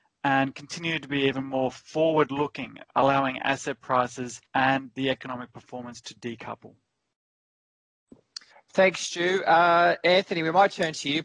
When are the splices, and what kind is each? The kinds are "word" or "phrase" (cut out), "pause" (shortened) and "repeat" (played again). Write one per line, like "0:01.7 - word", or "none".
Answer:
0:04.5 - pause
0:08.5 - pause

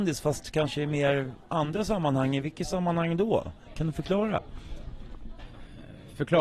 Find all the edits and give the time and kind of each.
none

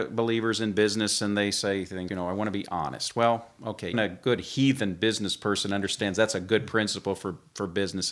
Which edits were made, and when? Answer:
0:02.1 - word
0:03.9 - word

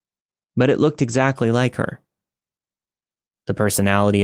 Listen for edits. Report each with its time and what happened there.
none

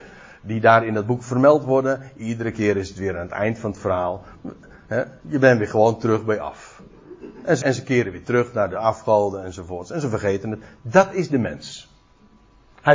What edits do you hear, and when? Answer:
0:07.6 - word

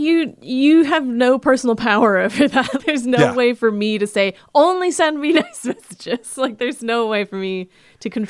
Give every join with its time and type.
0:02.8 - word

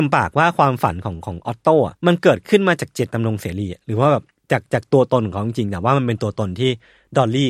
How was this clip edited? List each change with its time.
0:02.0 - pause

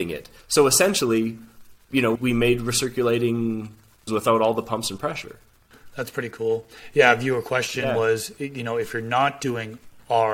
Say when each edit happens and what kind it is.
0:02.2 - word
0:04.1 - word

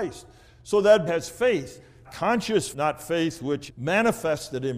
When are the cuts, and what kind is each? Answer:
0:01.1 - word
0:02.0 - word
0:02.7 - word
0:03.7 - word

